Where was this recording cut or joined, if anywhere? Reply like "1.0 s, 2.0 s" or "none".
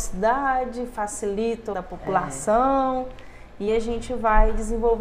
1.7 s, 3.7 s